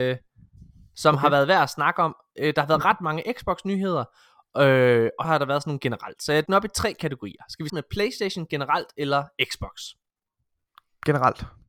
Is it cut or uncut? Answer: cut